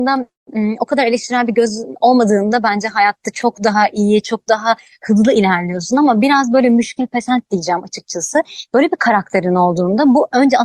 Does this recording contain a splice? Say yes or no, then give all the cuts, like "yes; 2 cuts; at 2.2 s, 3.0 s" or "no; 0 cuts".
no; 0 cuts